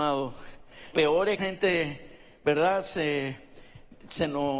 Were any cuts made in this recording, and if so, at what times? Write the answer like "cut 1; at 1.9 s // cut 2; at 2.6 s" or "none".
cut 1; at 0.9 s // cut 2; at 1.4 s